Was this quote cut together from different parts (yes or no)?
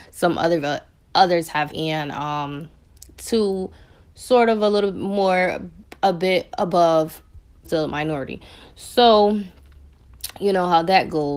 yes